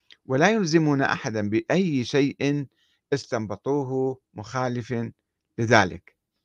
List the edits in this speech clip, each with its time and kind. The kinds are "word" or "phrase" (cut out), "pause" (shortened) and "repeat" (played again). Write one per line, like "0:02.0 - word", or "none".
0:04.2 - pause